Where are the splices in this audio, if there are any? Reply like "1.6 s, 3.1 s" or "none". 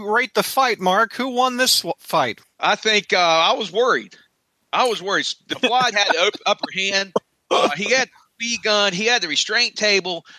2.4 s, 5.9 s

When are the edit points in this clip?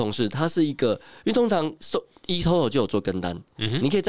none

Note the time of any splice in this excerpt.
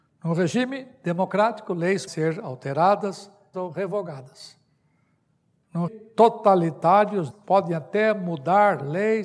2.1 s, 3.5 s, 5.9 s, 7.3 s

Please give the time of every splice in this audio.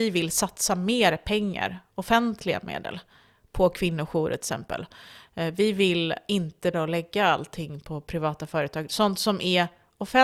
6.7 s

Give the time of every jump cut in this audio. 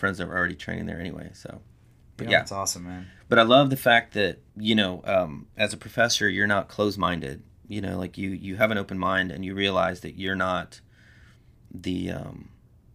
4.5 s

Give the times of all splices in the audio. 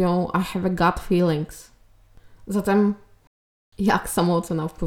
none

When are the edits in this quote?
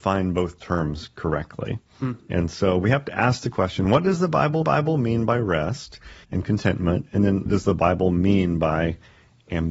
4.6 s, 6.2 s, 7.5 s

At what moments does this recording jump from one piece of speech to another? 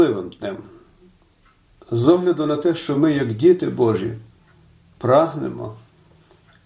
none

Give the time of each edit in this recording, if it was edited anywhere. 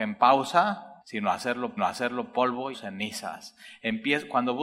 1.0 s, 1.8 s, 2.7 s

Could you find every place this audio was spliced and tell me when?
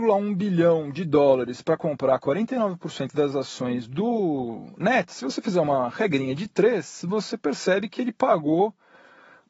none

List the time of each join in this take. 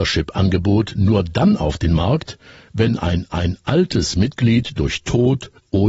3.3 s

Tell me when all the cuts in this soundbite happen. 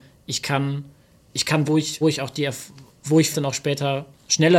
1.2 s, 1.6 s, 2.0 s, 3.3 s

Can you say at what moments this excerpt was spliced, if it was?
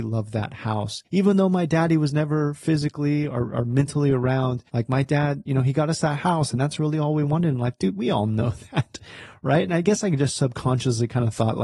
1.0 s, 4.7 s

